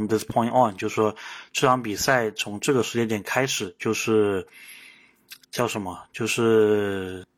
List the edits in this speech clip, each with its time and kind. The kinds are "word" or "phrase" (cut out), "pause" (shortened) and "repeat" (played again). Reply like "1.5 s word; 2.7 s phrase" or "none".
5.4 s pause